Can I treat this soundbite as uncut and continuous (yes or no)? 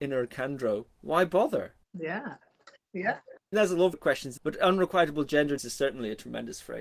no